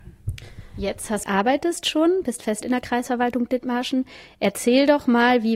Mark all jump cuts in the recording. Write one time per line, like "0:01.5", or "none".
0:01.2
0:02.6